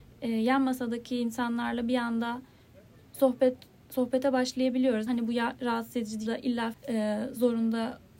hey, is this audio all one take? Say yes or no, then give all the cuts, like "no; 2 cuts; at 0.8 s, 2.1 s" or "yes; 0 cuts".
no; 3 cuts; at 5.1 s, 6.3 s, 6.7 s